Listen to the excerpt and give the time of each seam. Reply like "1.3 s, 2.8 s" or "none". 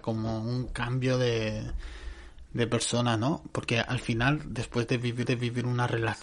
5.2 s